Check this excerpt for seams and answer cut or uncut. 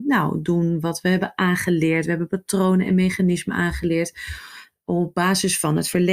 uncut